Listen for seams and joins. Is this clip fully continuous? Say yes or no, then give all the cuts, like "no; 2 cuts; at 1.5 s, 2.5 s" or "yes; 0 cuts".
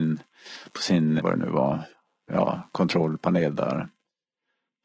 no; 2 cuts; at 1.2 s, 2.3 s